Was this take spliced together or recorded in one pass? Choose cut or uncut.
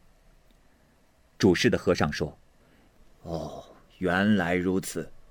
uncut